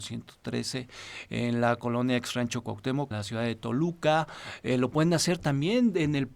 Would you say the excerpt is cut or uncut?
cut